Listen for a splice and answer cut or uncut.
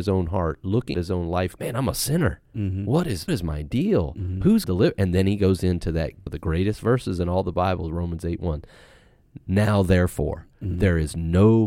cut